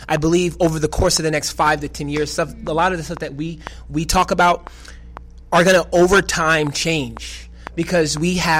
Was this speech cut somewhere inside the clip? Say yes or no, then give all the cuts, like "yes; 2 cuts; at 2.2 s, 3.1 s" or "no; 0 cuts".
no; 0 cuts